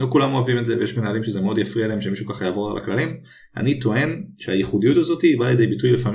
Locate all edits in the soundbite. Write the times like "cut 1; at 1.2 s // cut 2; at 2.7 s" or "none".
none

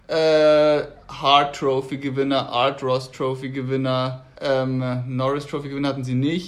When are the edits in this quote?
cut 1; at 4.3 s

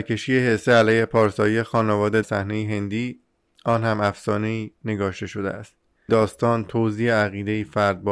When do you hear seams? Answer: cut 1; at 2.2 s // cut 2; at 6.1 s

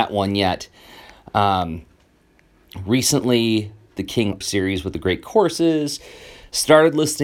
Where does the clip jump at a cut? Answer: cut 1; at 4.0 s // cut 2; at 4.4 s

